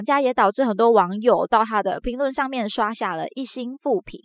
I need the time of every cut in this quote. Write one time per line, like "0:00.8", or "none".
0:02.0